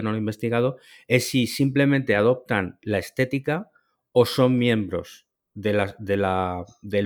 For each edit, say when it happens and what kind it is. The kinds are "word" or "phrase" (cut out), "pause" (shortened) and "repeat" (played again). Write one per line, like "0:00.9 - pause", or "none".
none